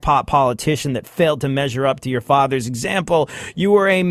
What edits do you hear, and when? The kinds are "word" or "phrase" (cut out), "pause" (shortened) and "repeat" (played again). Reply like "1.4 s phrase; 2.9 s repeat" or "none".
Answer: none